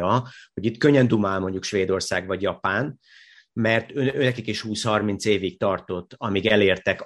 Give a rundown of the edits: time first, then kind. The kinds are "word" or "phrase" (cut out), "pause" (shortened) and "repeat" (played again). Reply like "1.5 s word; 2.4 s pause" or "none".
none